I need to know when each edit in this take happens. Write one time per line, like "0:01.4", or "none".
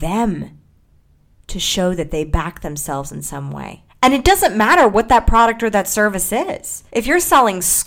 0:03.9
0:06.9

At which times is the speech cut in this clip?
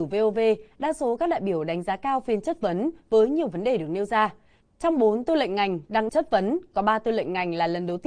0:06.1

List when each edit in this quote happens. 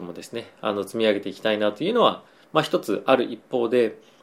none

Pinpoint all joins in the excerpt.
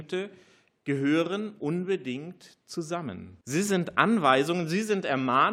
0:03.4

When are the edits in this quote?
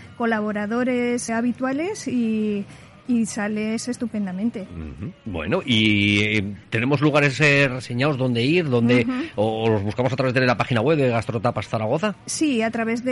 0:01.3

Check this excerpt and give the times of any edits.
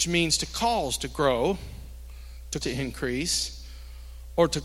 0:02.6

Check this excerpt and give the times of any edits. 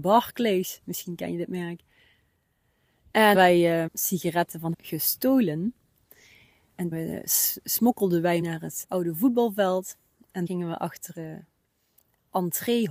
0:03.3
0:03.9
0:04.7
0:06.9
0:08.4
0:08.8
0:10.5
0:11.1

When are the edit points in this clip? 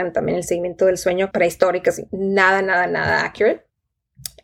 0:01.3
0:02.1

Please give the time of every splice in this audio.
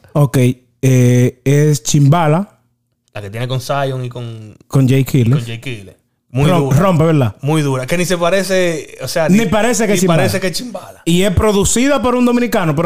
0:06.1

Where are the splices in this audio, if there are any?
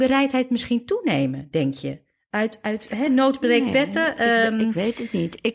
none

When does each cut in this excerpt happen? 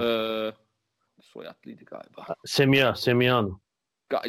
0:01.1

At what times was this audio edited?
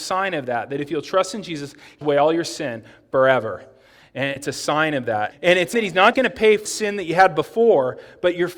0:02.0
0:04.4
0:05.3
0:05.7
0:06.1
0:06.7

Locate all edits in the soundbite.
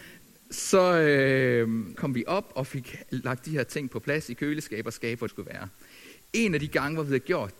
0:01.9
0:05.3

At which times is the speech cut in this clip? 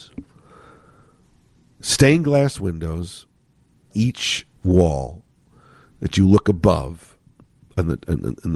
0:03.9
0:04.6

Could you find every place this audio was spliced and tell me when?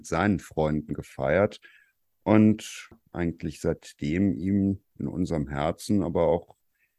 none

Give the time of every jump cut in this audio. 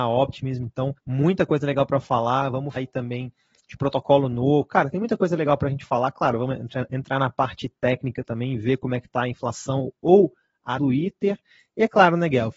0:01.0
0:02.8
0:10.8

